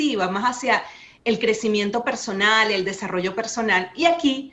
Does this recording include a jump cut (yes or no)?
no